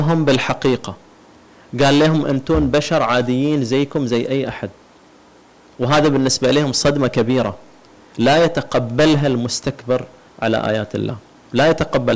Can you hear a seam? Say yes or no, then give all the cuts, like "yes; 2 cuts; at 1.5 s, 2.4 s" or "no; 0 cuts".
no; 0 cuts